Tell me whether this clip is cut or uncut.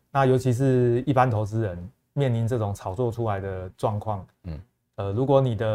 uncut